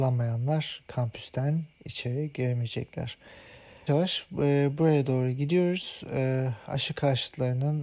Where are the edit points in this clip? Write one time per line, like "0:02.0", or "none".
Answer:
0:03.9